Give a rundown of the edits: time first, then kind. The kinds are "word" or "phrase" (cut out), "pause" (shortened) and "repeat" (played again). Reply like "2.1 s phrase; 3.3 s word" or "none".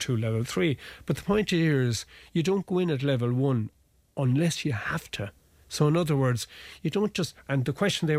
none